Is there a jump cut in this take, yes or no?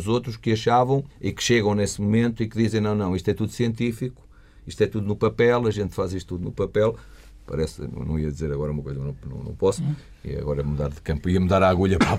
yes